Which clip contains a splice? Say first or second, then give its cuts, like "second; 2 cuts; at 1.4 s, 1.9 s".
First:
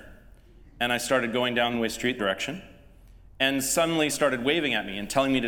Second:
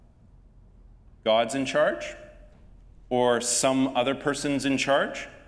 first; 3 cuts; at 1.7 s, 2.2 s, 4.1 s